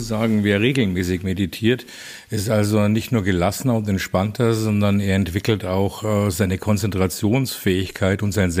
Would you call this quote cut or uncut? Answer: uncut